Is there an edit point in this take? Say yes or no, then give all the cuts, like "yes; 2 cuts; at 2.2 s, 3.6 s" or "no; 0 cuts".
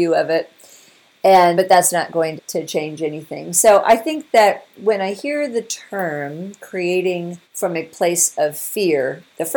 yes; 3 cuts; at 1.6 s, 2.4 s, 7.4 s